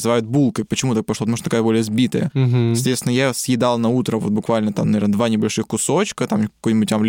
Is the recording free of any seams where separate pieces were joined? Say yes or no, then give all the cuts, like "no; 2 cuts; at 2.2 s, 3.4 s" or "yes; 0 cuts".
yes; 0 cuts